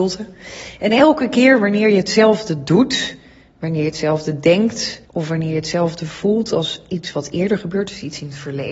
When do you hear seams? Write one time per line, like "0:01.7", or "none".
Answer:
0:05.1